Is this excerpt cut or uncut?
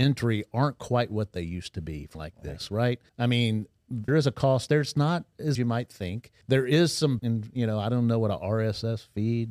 cut